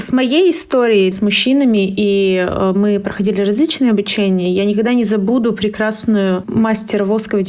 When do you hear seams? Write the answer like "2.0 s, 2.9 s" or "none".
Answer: 1.1 s